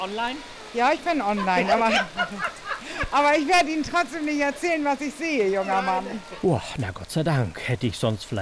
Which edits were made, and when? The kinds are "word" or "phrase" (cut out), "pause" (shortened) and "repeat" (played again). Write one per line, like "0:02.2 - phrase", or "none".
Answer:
none